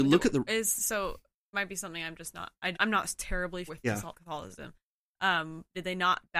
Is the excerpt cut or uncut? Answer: cut